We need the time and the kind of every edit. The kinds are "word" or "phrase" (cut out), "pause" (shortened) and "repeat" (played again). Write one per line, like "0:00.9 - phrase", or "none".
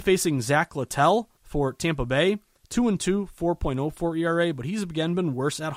0:01.4 - pause